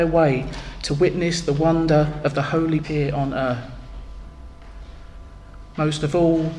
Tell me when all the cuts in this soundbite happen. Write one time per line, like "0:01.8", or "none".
0:02.8